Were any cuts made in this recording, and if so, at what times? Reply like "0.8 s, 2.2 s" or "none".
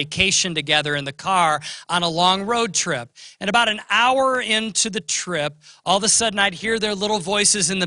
none